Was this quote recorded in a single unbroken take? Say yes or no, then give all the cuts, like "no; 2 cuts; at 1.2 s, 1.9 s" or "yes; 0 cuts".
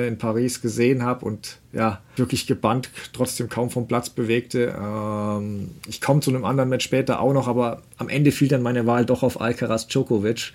no; 1 cut; at 2.2 s